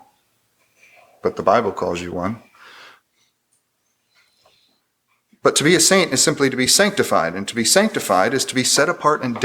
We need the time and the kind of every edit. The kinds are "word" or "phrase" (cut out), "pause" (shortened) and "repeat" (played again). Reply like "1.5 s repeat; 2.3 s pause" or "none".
none